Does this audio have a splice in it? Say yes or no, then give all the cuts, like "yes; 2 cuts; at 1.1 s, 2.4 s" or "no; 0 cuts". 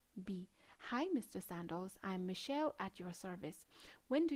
no; 0 cuts